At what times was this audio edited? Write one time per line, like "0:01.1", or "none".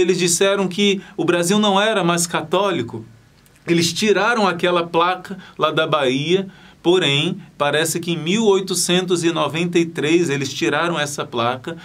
none